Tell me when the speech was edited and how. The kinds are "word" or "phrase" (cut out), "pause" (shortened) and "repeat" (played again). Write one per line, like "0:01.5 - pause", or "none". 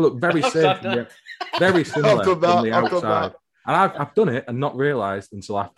none